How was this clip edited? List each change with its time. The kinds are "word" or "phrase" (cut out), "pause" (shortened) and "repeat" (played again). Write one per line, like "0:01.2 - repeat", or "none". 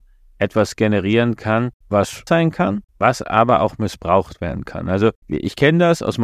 0:02.3 - word